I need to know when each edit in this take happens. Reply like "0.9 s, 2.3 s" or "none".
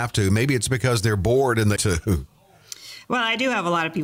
1.8 s